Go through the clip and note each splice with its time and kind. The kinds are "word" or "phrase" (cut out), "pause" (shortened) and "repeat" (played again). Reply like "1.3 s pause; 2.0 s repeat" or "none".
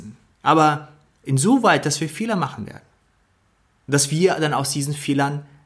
none